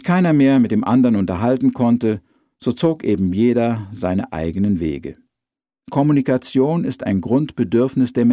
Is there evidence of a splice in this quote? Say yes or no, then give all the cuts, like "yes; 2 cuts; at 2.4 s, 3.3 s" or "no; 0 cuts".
no; 0 cuts